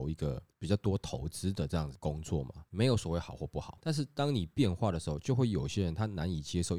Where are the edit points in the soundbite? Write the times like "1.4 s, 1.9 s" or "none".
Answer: 2.7 s

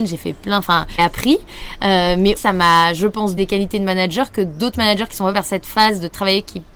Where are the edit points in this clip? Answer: 1.0 s, 2.4 s, 3.4 s, 5.3 s

